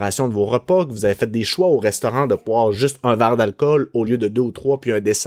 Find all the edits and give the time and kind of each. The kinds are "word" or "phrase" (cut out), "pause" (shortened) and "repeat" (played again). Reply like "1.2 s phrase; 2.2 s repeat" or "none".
none